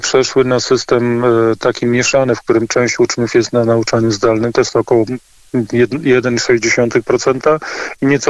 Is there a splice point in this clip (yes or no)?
no